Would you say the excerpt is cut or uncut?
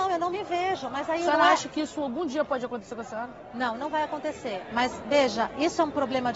uncut